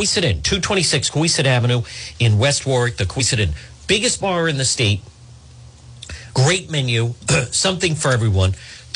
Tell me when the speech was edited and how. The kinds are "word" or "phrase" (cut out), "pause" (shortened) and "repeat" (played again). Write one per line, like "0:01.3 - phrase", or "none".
none